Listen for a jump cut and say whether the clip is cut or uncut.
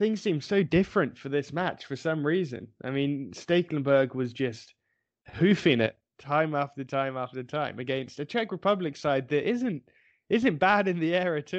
uncut